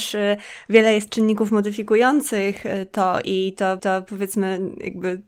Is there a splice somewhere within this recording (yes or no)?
yes